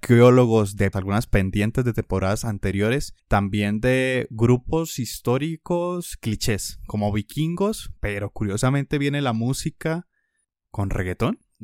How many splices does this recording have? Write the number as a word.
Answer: three